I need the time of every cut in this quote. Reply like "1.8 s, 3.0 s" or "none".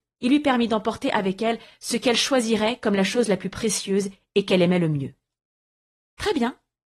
none